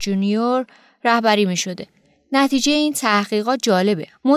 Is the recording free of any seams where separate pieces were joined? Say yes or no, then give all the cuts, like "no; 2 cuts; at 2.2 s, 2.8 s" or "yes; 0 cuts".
yes; 0 cuts